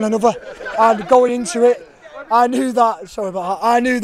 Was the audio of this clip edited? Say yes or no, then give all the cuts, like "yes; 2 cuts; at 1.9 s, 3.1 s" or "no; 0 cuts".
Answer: no; 0 cuts